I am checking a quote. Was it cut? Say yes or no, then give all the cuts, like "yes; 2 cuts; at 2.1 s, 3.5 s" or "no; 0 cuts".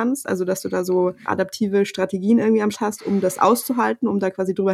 yes; 2 cuts; at 1.3 s, 2.7 s